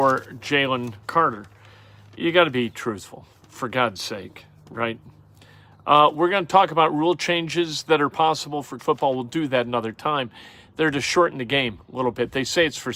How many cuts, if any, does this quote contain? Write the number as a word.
two